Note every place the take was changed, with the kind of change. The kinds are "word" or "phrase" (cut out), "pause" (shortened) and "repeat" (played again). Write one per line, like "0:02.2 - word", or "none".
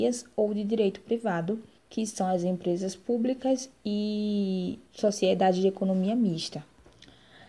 0:01.8 - pause
0:04.9 - pause